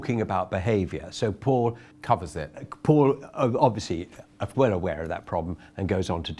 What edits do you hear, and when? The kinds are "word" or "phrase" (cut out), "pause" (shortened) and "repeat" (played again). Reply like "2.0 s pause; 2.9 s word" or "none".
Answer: 1.9 s pause; 4.5 s phrase